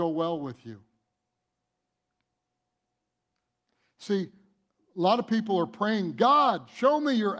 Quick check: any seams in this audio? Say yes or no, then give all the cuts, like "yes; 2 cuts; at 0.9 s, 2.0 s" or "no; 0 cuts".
no; 0 cuts